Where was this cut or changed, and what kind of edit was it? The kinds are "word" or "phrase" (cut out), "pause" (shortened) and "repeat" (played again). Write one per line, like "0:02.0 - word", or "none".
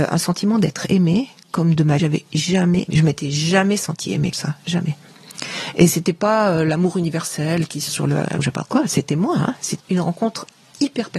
0:02.0 - word
0:02.9 - word
0:04.3 - word
0:07.9 - word
0:08.4 - word
0:09.8 - word